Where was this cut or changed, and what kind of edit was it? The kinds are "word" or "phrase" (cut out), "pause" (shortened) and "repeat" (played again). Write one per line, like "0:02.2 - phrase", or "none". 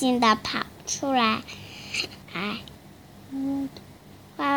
0:02.2 - pause